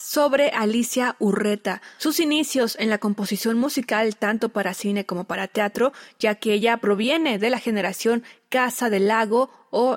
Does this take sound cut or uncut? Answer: uncut